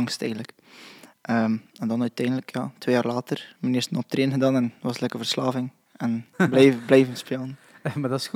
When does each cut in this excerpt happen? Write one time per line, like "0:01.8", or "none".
0:06.3